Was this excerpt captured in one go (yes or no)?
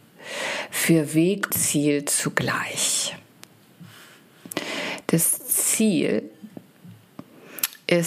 no